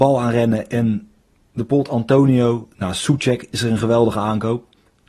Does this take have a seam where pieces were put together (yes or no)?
no